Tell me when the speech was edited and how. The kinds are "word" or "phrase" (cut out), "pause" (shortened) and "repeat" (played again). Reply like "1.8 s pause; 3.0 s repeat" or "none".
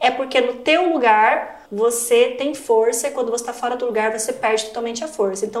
1.7 s pause